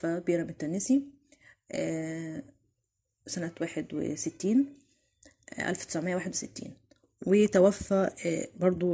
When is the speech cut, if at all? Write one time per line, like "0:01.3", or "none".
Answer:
none

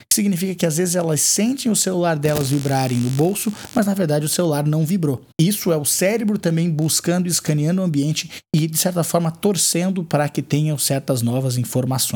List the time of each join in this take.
0:05.3

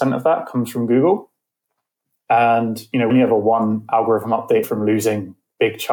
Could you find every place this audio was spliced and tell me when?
0:03.1
0:04.6

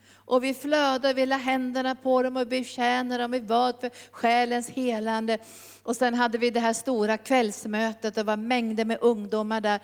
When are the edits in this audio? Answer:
none

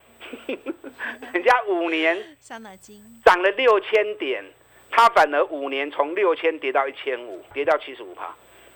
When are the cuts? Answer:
0:07.5

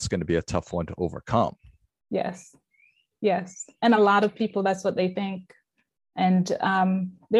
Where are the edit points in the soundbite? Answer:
none

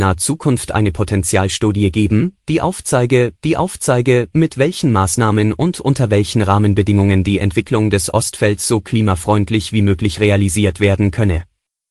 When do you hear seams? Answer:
0:03.4

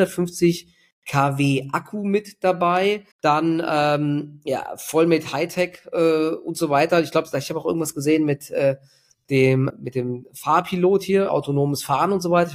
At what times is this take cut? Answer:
0:03.1
0:09.7
0:11.3

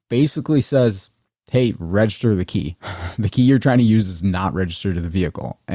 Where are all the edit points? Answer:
none

